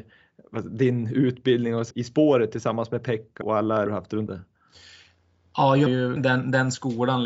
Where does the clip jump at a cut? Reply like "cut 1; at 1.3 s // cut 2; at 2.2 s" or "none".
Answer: cut 1; at 1.9 s // cut 2; at 3.4 s // cut 3; at 3.9 s // cut 4; at 4.3 s // cut 5; at 5.9 s // cut 6; at 6.2 s